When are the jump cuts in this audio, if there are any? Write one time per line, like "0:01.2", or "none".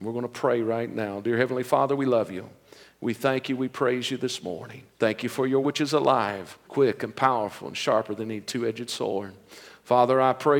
0:04.9
0:05.6
0:06.6

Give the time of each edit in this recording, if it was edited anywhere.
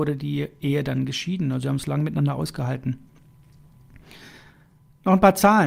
none

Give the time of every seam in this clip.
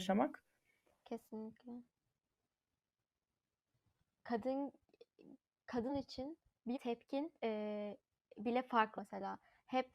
0:05.9
0:06.7
0:07.4
0:09.0

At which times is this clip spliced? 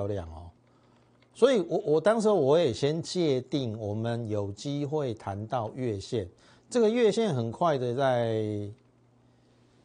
none

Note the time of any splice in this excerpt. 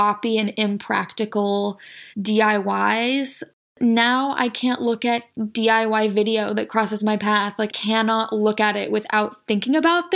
0:02.1
0:05.3
0:07.7

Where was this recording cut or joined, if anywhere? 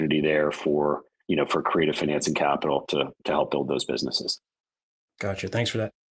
none

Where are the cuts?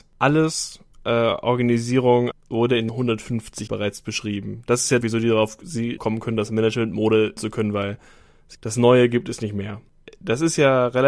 0:00.9
0:02.3
0:02.9
0:03.7
0:05.0
0:06.0
0:07.4
0:08.5

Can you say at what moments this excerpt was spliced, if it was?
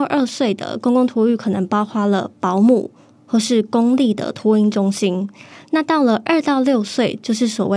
none

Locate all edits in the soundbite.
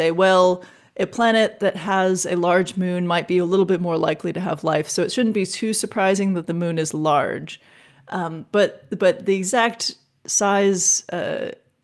none

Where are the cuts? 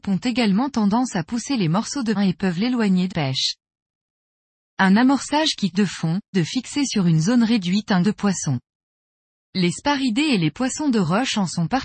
0:02.1
0:03.1
0:05.7
0:06.3
0:08.0

